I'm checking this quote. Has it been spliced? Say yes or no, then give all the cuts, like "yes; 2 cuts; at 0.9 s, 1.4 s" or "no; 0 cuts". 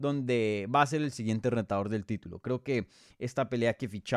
no; 0 cuts